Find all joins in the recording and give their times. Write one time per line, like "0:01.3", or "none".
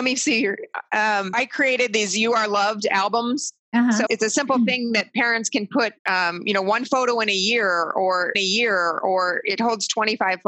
0:01.3
0:04.1
0:06.0
0:08.3